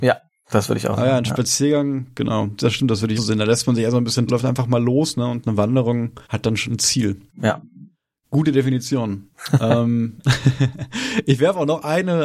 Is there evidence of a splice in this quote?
yes; 7 cuts; at 2.6 s, 3.2 s, 4.3 s, 6.2 s, 6.7 s, 7.3 s, 9.3 s

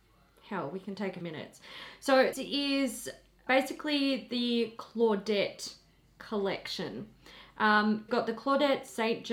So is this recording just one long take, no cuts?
no; 4 cuts; at 1.2 s, 2.3 s, 3.5 s, 8.1 s

